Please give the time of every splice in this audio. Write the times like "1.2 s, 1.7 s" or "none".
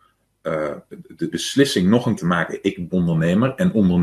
1.3 s, 2.2 s, 2.9 s